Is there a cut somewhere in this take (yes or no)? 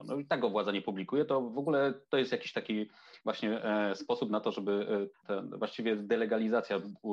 yes